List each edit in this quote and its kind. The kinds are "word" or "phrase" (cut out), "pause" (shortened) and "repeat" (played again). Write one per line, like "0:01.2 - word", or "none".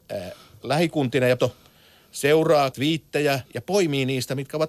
0:01.4 - word
0:02.7 - word
0:03.5 - pause